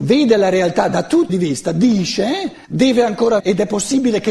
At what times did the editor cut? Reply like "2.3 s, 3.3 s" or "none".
1.3 s, 2.6 s, 3.4 s

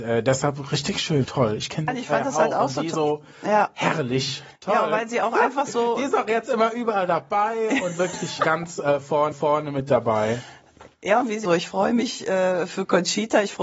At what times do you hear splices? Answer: 1.2 s, 1.9 s, 2.9 s, 8.4 s, 9.3 s, 11.4 s

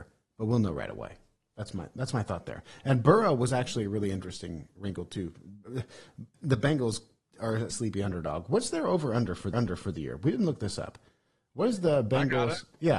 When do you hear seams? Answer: 6.3 s, 7.7 s, 9.5 s

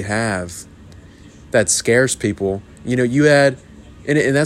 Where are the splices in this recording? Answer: none

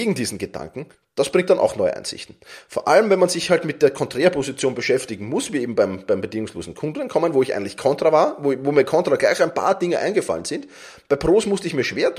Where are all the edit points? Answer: 0.9 s

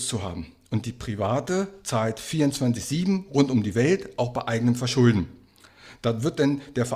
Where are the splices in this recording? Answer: none

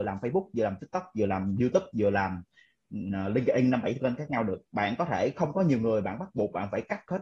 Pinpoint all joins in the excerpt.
none

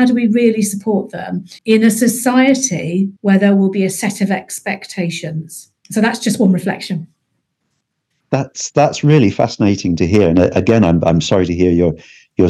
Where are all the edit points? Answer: 1.6 s, 3.2 s, 5.8 s

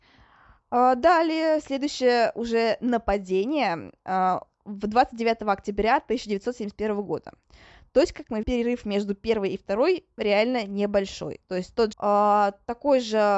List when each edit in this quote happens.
4.5 s, 8.4 s, 10.2 s, 11.9 s

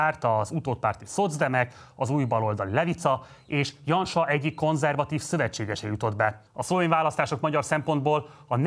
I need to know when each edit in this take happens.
6.5 s

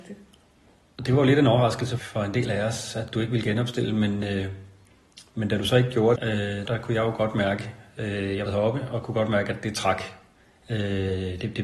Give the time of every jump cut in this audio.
2.0 s, 6.2 s, 6.7 s, 8.5 s

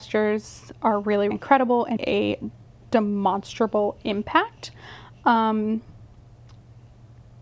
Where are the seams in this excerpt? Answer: 1.3 s, 2.0 s

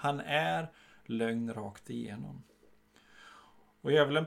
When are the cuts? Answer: none

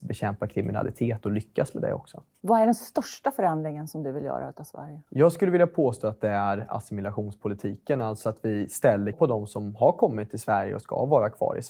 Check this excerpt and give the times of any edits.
5.1 s, 9.1 s

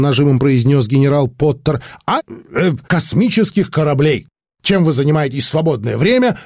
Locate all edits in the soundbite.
2.2 s, 2.8 s

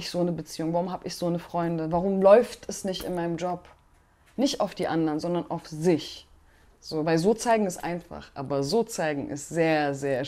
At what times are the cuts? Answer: none

